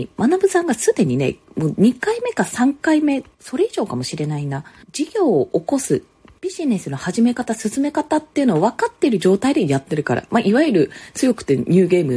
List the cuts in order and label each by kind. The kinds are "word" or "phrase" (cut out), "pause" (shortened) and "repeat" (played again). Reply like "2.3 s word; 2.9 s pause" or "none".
none